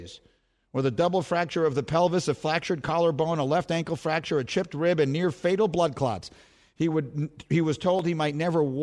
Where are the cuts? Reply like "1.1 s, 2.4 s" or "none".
none